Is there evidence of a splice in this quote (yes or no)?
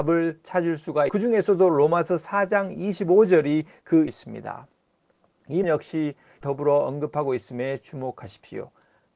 yes